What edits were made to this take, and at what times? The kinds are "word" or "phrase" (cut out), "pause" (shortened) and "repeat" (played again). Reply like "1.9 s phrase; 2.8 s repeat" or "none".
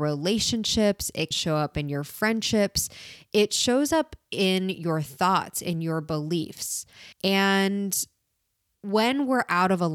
1.3 s word; 7.1 s pause